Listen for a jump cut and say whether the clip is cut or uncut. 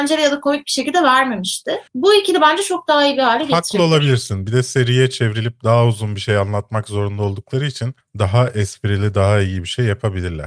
cut